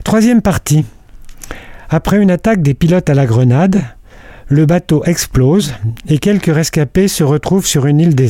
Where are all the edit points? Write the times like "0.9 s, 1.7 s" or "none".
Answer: none